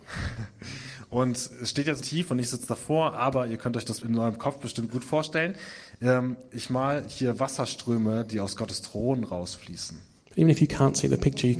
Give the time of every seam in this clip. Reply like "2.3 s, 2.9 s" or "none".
2.0 s, 4.0 s